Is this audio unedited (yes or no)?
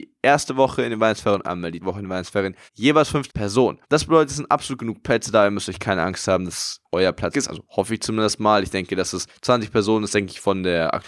no